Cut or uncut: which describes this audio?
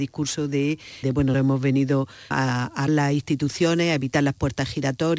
cut